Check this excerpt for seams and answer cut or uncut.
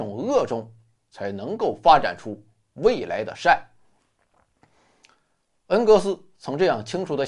uncut